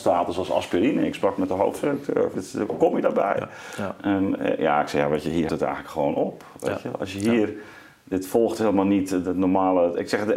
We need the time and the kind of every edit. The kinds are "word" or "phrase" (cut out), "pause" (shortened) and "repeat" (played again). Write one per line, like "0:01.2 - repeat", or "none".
0:02.3 - word
0:05.5 - word
0:07.9 - pause